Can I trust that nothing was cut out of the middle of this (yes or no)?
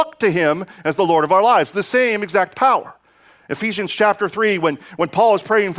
yes